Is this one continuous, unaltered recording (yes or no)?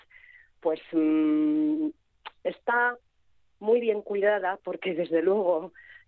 yes